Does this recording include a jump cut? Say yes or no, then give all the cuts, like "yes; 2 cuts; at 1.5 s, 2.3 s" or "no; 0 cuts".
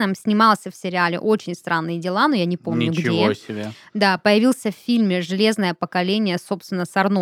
no; 0 cuts